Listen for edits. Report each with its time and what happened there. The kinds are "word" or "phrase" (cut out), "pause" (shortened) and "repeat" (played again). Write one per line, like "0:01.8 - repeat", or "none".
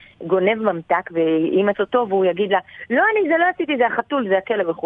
0:01.7 - word